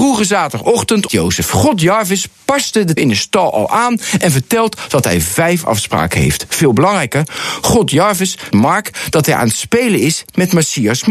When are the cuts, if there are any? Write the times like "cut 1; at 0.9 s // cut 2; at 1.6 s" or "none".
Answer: cut 1; at 1.1 s // cut 2; at 3.0 s // cut 3; at 8.5 s